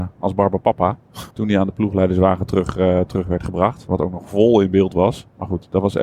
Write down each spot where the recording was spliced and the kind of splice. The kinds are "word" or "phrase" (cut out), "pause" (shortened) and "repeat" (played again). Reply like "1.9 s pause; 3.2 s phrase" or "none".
1.3 s pause